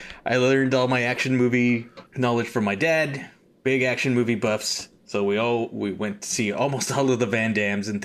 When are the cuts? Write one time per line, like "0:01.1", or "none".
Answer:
0:02.1